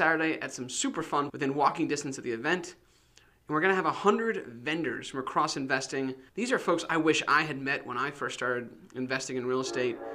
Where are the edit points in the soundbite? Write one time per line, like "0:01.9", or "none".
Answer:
0:01.3
0:06.3